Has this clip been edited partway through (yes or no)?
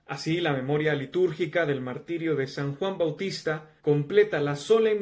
yes